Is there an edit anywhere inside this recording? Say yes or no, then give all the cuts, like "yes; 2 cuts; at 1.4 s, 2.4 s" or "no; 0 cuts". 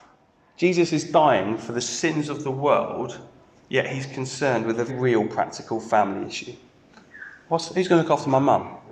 yes; 1 cut; at 4.9 s